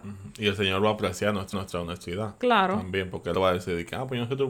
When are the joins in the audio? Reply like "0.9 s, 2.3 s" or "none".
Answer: 1.5 s, 3.3 s